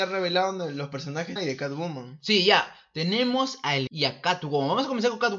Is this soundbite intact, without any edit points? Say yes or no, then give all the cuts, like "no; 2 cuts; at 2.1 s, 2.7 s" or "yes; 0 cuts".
no; 2 cuts; at 1.4 s, 3.9 s